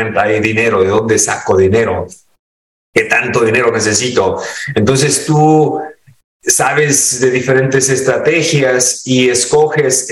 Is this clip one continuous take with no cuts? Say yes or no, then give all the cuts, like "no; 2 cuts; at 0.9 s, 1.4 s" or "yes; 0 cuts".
yes; 0 cuts